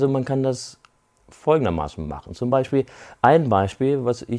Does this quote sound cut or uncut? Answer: uncut